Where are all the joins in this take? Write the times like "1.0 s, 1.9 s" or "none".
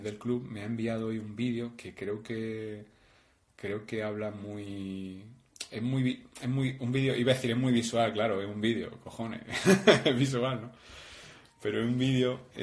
none